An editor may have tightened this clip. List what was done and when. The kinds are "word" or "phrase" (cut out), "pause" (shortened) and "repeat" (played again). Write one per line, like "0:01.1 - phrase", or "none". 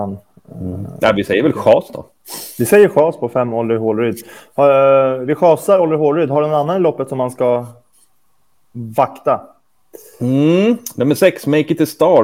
none